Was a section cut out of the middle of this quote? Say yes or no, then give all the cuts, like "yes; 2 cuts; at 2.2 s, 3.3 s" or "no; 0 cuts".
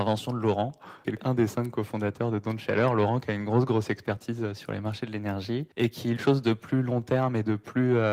yes; 2 cuts; at 5.7 s, 6.2 s